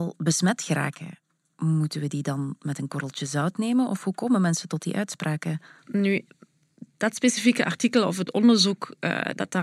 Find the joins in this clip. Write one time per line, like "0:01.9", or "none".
none